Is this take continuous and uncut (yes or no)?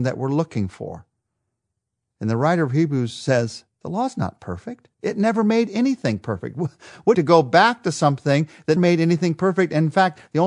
no